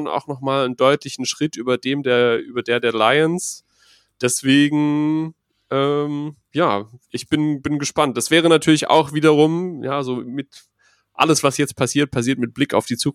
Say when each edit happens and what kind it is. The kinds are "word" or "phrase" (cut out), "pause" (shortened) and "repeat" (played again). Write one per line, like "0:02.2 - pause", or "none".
none